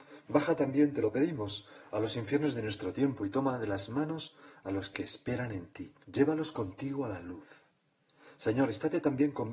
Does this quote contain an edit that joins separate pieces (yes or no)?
yes